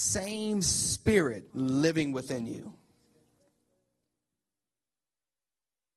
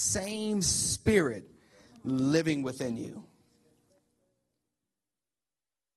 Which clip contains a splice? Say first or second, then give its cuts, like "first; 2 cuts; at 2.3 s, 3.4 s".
first; 1 cut; at 1.5 s